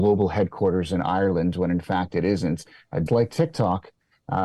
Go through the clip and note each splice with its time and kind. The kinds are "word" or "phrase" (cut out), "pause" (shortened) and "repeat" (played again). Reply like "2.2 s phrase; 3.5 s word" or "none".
3.1 s word